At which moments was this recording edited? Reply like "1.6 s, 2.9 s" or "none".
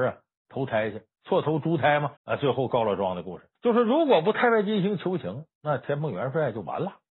2.2 s, 3.6 s